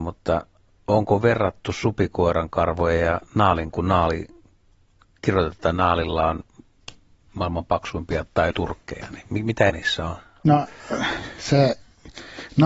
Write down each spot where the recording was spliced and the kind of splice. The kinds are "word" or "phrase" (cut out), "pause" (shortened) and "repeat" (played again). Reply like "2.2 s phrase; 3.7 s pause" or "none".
3.7 s word; 8.5 s word; 9.7 s word

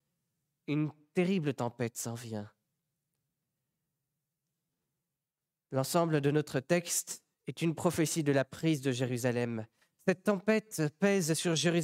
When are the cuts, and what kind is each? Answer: none

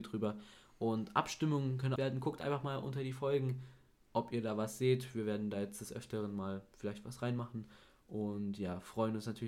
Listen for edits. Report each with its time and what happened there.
2.0 s phrase

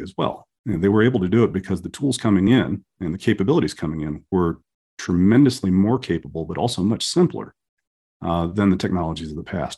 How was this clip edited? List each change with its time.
none

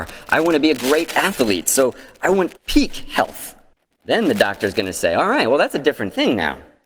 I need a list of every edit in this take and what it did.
2.6 s pause; 3.7 s pause

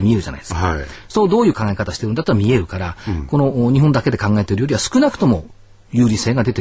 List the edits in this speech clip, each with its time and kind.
none

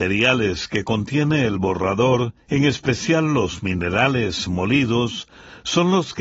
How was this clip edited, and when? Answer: 2.4 s pause

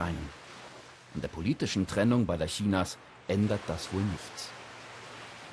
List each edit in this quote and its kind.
none

